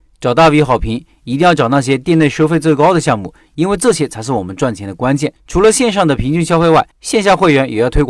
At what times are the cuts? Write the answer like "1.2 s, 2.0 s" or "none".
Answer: 5.4 s, 6.9 s